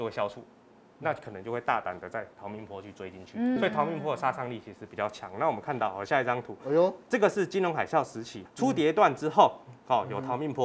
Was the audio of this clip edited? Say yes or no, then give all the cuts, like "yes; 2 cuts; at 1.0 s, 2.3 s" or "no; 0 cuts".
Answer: yes; 2 cuts; at 3.6 s, 8.5 s